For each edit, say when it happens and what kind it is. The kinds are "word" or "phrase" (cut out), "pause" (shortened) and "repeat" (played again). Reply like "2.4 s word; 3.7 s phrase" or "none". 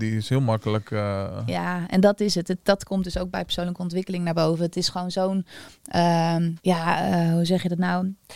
6.6 s pause